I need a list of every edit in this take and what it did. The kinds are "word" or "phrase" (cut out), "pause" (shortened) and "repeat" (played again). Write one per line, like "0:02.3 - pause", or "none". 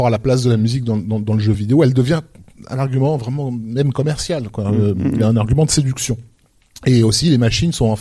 none